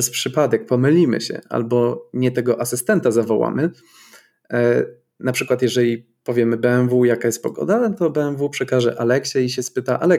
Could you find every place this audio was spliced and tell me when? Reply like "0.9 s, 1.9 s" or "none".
none